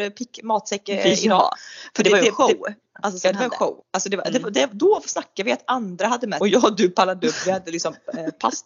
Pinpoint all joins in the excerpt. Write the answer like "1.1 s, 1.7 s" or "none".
3.8 s, 6.4 s